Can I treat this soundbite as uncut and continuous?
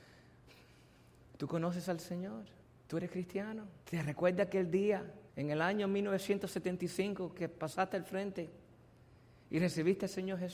no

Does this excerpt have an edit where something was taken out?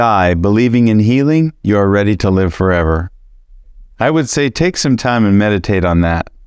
yes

